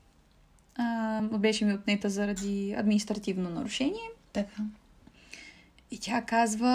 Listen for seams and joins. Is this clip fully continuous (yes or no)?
yes